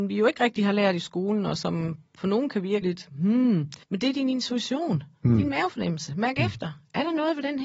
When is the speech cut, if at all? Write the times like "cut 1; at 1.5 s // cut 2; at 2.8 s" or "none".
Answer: cut 1; at 2.1 s // cut 2; at 2.8 s // cut 3; at 3.8 s